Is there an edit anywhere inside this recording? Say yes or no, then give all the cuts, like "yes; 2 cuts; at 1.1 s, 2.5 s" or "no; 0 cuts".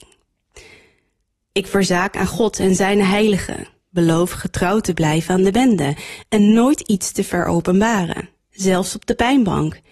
no; 0 cuts